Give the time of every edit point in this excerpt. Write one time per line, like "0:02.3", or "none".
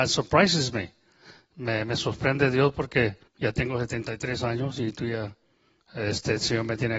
0:03.3